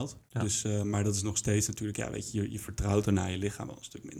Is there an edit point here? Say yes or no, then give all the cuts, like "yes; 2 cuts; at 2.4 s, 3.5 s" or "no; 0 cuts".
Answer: no; 0 cuts